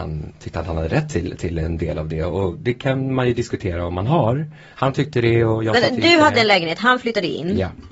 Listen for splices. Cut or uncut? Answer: uncut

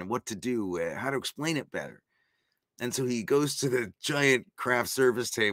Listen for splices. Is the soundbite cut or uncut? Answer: uncut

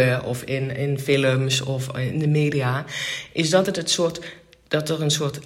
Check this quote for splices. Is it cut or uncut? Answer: uncut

